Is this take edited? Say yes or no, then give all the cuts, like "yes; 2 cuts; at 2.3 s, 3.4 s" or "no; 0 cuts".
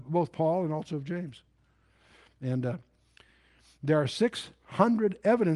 no; 0 cuts